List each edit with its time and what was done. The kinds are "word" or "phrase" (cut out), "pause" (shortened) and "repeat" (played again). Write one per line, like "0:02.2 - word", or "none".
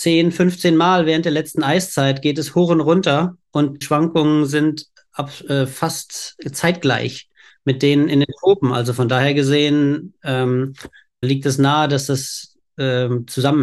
0:03.8 - word
0:11.2 - word